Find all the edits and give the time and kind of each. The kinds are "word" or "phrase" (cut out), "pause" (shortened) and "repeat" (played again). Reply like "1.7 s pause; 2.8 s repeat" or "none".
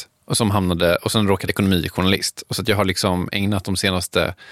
1.5 s word